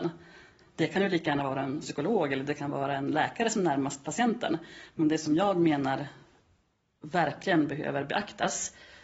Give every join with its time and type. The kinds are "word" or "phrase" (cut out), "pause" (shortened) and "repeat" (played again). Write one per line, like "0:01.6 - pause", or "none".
none